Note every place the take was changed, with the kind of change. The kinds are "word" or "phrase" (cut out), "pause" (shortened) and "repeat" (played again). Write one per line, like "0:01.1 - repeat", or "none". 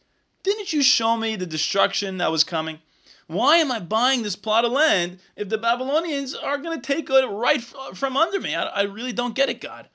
none